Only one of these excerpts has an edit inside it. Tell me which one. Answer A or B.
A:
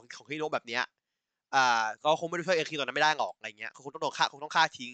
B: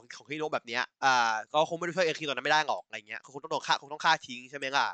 B